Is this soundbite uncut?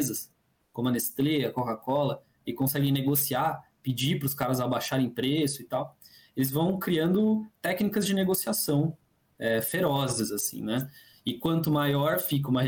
yes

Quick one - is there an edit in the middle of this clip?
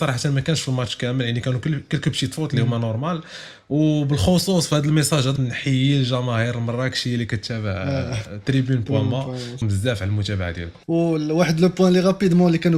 yes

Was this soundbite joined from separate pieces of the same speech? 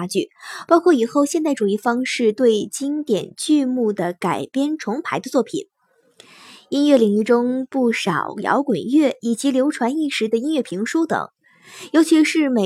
no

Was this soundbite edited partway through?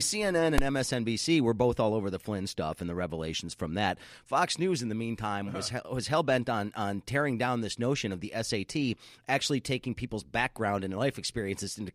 no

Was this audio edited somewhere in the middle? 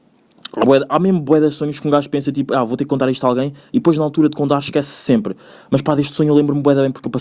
no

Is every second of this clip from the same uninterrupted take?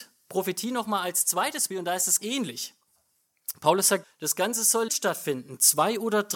no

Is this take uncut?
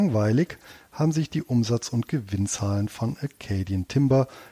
yes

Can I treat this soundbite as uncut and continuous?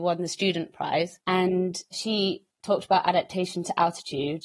yes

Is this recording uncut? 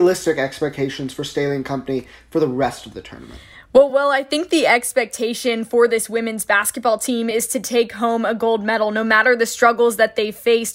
yes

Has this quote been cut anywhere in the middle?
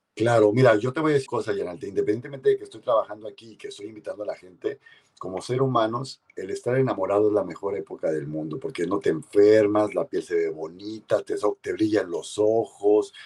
yes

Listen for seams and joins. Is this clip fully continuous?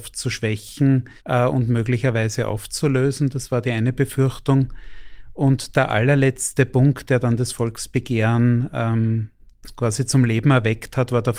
no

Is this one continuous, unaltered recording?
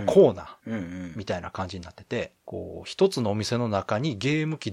no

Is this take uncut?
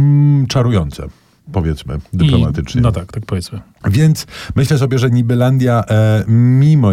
yes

